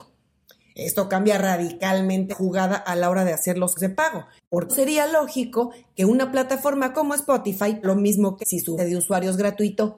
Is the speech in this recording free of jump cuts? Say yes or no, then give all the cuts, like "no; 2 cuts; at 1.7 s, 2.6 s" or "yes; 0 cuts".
no; 6 cuts; at 2.3 s, 3.8 s, 4.7 s, 7.8 s, 8.4 s, 8.8 s